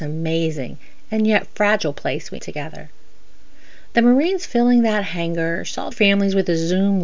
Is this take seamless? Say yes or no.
no